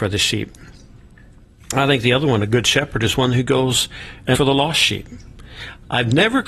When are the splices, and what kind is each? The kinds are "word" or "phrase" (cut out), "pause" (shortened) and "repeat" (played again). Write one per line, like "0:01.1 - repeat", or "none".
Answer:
0:04.3 - word